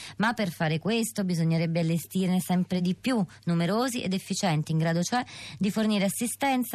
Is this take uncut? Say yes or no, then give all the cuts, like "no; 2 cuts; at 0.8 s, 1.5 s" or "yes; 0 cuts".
yes; 0 cuts